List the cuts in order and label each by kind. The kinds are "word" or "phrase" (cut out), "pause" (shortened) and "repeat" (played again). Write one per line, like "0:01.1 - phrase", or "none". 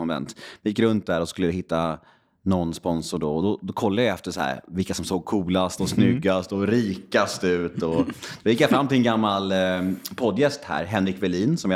none